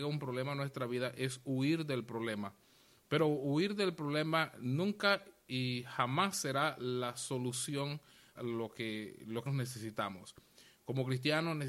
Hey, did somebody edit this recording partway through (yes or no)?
yes